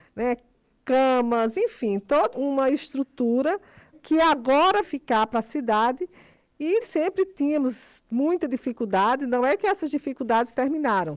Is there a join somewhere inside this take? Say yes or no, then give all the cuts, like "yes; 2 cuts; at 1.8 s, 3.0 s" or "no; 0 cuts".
yes; 4 cuts; at 2.3 s, 3.9 s, 4.8 s, 6.8 s